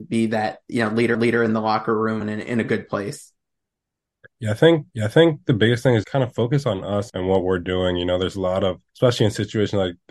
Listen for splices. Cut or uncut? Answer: cut